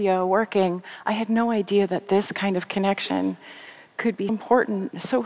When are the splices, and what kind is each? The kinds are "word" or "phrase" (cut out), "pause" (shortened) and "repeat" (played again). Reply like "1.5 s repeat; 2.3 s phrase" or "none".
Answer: 4.3 s word

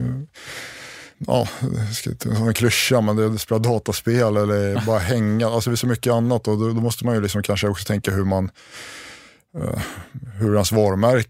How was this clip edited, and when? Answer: 1.1 s pause

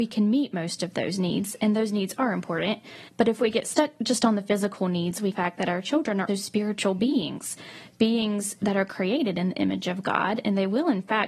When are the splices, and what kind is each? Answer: 3.1 s pause; 5.3 s phrase; 6.3 s word

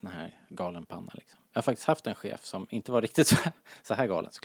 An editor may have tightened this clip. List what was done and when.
1.5 s pause

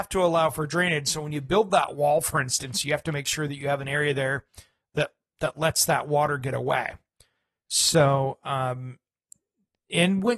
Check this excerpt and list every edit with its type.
none

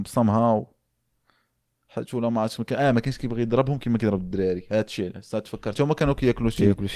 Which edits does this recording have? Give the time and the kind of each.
5.7 s word

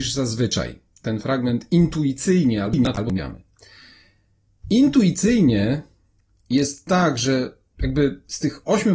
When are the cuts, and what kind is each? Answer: none

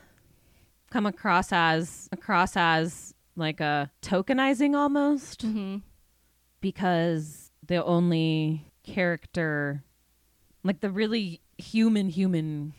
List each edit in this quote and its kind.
2.1 s repeat; 4.0 s pause

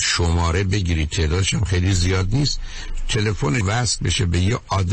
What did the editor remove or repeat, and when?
3.6 s word

